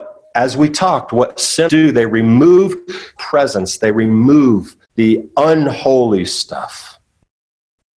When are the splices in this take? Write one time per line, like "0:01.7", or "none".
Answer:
0:01.7
0:03.2
0:04.8

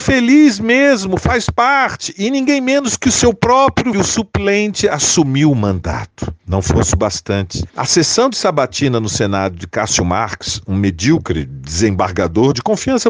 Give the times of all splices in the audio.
0:03.9
0:06.4
0:07.7

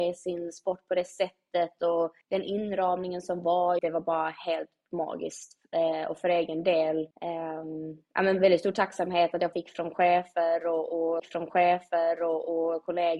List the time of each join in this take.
0:02.2
0:03.8
0:07.1
0:09.5
0:11.2

